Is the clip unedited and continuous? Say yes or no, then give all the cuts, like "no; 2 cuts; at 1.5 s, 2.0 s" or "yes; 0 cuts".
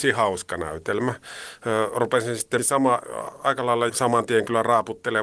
no; 2 cuts; at 2.6 s, 3.9 s